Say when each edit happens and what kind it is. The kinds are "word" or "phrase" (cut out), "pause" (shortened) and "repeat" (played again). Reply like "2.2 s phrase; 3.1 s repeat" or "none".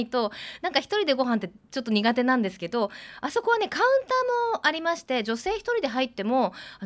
1.6 s pause